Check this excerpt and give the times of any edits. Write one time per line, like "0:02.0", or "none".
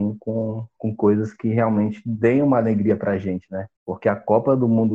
0:03.8